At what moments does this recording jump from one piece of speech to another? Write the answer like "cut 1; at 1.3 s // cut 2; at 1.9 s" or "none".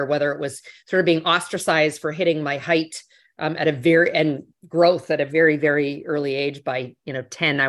none